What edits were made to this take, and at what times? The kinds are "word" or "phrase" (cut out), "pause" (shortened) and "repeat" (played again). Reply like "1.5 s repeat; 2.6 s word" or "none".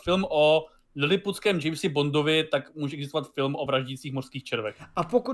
none